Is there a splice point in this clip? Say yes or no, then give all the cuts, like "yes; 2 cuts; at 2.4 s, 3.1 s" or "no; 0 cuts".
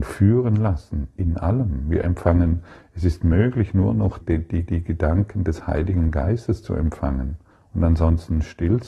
yes; 3 cuts; at 4.2 s, 4.7 s, 7.5 s